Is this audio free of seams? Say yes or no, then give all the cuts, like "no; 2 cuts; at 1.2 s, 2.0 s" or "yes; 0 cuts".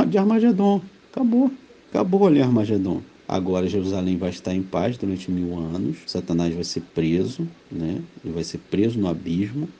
no; 4 cuts; at 1.7 s, 3.1 s, 6.0 s, 7.6 s